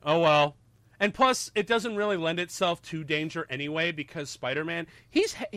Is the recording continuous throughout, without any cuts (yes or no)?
yes